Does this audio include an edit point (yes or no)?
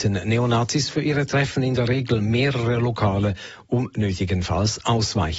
no